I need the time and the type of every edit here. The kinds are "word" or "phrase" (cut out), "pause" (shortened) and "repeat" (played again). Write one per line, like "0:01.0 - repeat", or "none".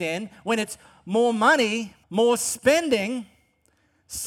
0:02.0 - pause